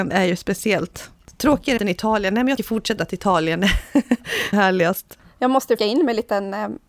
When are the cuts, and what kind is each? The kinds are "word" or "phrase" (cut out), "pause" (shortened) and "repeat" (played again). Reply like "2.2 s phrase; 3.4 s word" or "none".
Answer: 1.8 s word; 2.6 s word; 3.0 s word; 4.5 s word; 5.8 s word